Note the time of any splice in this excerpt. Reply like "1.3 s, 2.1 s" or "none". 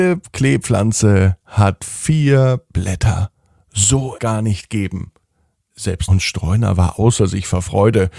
4.2 s, 6.1 s